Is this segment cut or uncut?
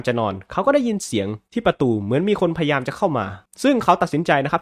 cut